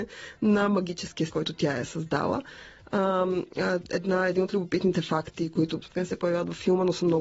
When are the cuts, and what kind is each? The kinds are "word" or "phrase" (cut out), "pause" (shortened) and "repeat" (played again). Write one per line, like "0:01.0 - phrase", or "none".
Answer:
0:01.3 - word
0:05.8 - phrase